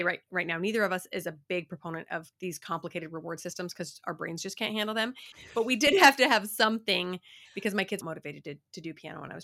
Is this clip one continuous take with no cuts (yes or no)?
no